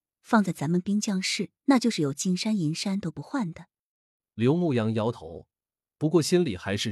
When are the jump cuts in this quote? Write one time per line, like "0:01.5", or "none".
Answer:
0:01.6